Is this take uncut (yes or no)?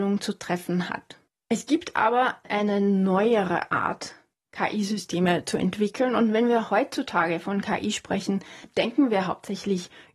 yes